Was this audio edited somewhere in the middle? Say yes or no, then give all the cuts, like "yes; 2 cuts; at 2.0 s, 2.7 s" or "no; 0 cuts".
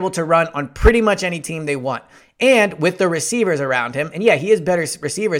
no; 0 cuts